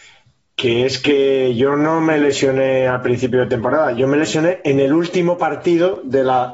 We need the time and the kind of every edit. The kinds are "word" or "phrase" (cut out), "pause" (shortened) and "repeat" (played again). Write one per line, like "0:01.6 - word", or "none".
none

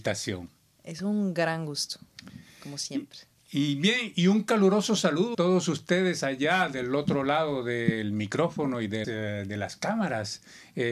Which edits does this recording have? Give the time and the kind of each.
0:05.3 - word
0:09.0 - word

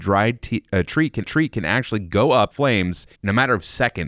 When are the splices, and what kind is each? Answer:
0:01.2 - repeat
0:02.5 - word
0:03.1 - pause

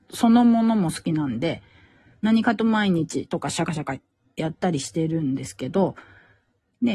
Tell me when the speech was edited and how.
none

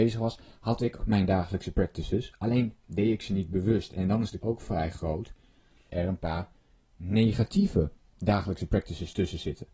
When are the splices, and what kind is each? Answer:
0:01.0 - word
0:04.4 - word
0:05.9 - word
0:08.1 - word

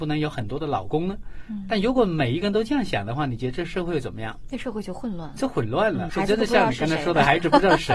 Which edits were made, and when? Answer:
0:06.1 - word

